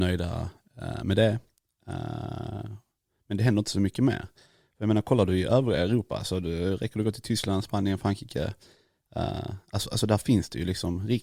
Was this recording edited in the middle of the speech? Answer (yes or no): no